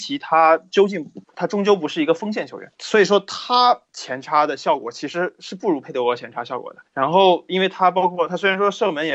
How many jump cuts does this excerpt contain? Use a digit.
4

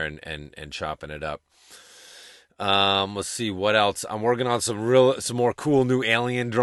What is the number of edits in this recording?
0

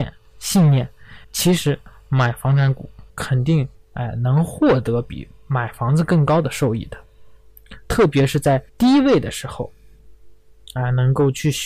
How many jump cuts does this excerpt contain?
4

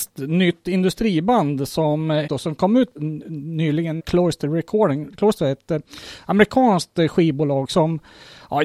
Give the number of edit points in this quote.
4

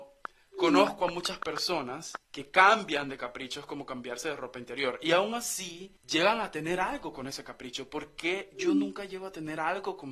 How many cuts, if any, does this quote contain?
2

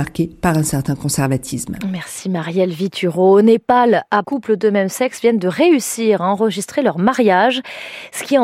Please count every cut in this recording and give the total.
1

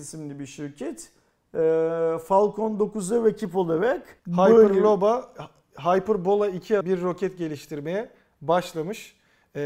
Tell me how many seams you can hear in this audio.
2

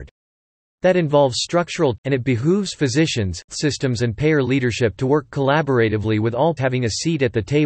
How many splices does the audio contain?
3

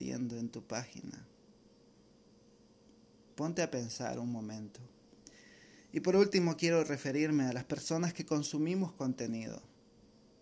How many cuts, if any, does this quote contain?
0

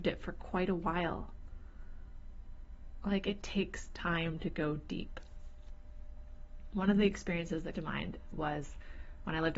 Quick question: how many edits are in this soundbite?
1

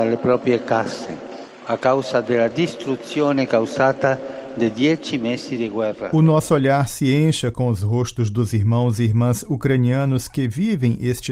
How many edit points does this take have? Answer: 0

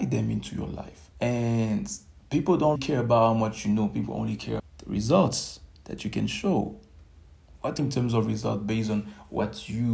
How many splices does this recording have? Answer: 4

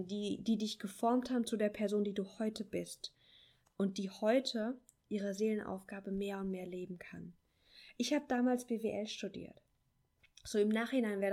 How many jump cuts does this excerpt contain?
0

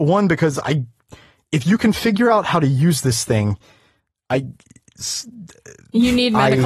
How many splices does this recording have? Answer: 0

